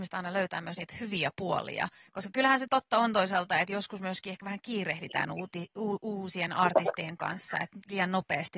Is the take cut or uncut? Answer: uncut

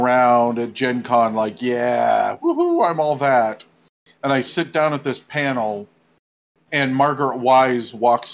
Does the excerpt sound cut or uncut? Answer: uncut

